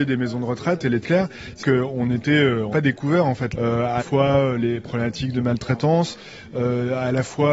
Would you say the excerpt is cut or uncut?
cut